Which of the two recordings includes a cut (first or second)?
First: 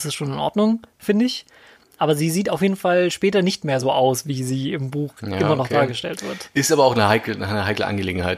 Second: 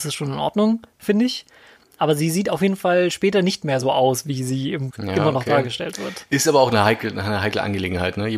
second